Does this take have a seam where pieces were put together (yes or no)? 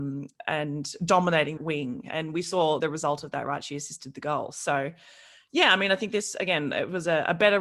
yes